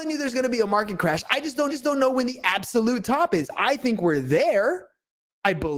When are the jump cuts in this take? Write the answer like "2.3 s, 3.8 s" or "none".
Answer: 1.7 s

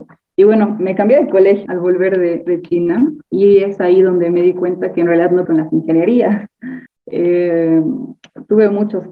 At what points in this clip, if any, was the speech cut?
1.7 s, 3.3 s, 5.4 s, 6.9 s

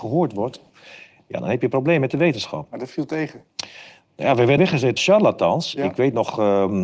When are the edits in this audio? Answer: 4.6 s, 5.0 s

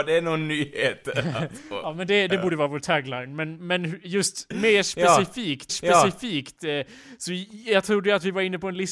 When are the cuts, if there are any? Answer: 5.7 s

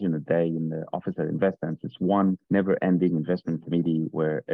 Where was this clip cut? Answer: 2.4 s

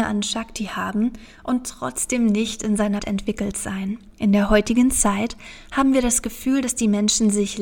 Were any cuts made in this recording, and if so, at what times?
3.0 s, 4.1 s

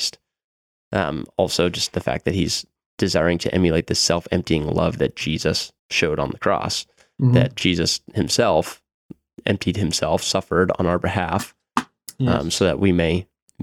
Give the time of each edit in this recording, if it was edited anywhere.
5.8 s

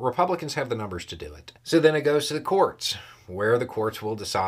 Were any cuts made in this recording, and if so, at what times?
1.6 s

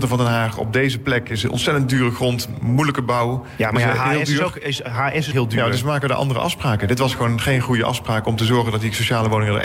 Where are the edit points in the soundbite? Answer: 5.3 s

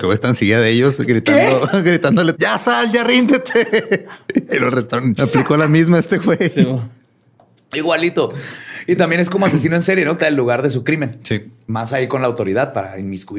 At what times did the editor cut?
2.3 s, 5.2 s, 10.2 s

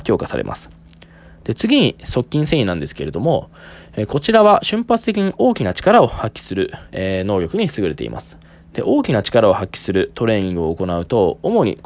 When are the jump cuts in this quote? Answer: 6.9 s, 8.4 s

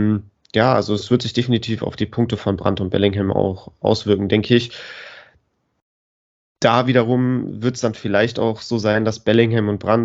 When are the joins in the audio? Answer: none

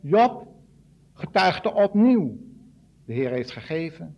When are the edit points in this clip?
none

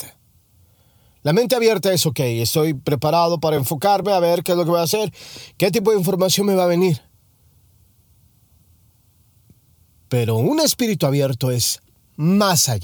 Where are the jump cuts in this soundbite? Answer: none

